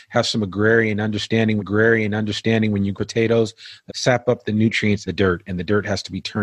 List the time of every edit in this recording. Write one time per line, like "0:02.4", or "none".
0:01.6
0:02.9
0:03.9
0:05.1